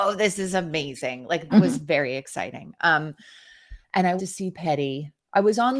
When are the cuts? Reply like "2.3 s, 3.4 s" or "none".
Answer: 1.5 s, 4.2 s, 4.5 s